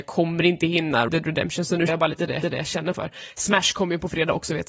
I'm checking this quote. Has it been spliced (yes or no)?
yes